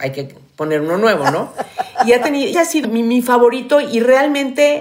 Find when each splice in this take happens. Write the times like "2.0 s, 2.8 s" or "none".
2.5 s, 2.8 s

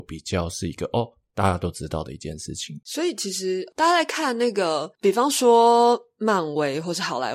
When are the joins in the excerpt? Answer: none

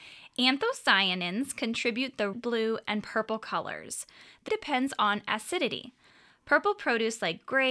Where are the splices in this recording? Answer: 2.3 s, 4.5 s

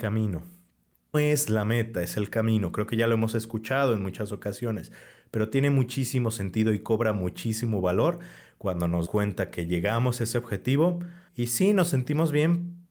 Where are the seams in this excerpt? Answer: 1.1 s, 9.0 s, 11.3 s

